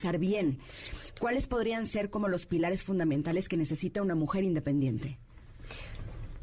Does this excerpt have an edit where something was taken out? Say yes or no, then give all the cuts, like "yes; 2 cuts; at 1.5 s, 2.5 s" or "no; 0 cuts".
no; 0 cuts